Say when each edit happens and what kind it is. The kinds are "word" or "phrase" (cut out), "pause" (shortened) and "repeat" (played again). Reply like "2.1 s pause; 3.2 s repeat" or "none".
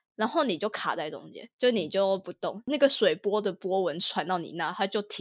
1.5 s pause